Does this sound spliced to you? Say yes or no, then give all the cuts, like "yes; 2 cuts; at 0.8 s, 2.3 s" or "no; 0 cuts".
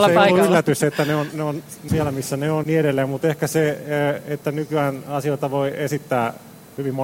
yes; 2 cuts; at 1.9 s, 2.6 s